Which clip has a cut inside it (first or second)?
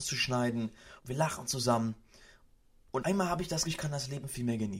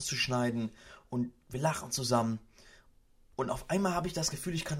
first